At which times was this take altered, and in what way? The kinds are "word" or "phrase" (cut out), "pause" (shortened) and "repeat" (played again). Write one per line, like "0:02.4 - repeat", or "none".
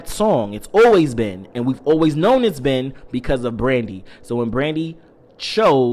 none

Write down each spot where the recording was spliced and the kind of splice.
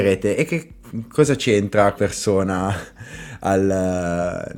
0:02.0 - word

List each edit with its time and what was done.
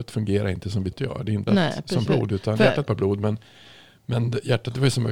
0:00.9 - word
0:01.5 - word
0:02.1 - word
0:02.9 - word

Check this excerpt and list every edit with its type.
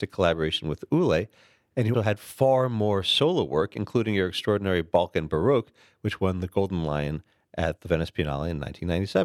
0:01.9 - word

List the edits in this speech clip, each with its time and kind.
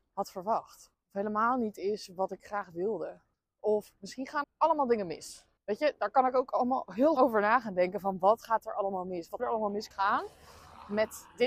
0:00.9 - pause
0:03.3 - pause
0:04.4 - word
0:05.6 - pause
0:07.2 - word
0:09.4 - word
0:09.9 - word

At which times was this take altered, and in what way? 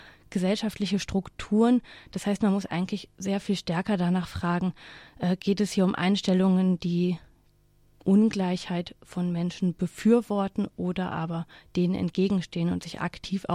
none

